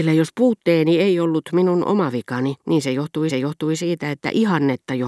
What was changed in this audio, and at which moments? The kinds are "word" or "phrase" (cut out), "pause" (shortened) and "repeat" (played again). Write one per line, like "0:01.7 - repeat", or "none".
0:02.6 - pause
0:03.3 - repeat